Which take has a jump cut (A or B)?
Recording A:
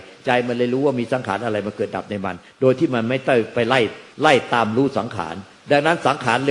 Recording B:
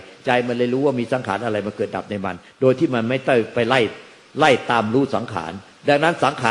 A